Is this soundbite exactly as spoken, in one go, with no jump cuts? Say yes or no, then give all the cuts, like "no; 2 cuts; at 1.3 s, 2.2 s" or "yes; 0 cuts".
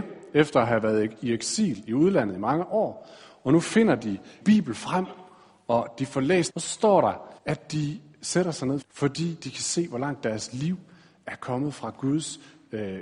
no; 4 cuts; at 4.4 s, 6.5 s, 7.4 s, 8.8 s